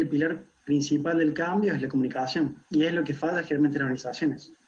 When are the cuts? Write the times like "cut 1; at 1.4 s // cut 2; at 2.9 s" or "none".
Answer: cut 1; at 2.6 s